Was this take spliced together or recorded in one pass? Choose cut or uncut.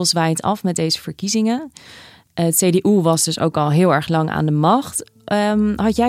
uncut